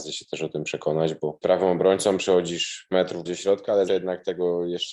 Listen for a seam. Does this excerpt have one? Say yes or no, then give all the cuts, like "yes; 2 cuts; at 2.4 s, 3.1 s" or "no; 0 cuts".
yes; 4 cuts; at 1.4 s, 2.9 s, 3.3 s, 3.9 s